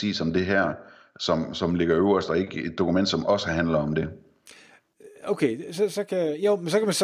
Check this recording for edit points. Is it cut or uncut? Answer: uncut